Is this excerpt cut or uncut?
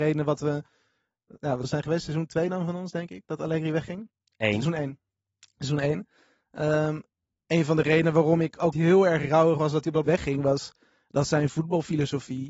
cut